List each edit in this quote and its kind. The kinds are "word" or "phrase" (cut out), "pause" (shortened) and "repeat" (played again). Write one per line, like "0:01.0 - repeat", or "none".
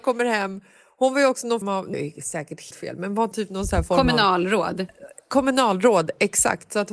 0:01.6 - word
0:01.9 - word
0:02.7 - word
0:03.3 - word